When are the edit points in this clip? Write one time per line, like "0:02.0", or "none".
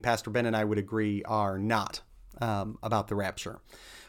none